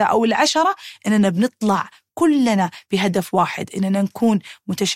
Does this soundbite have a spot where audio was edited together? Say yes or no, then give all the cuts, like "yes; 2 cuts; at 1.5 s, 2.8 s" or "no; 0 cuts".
no; 0 cuts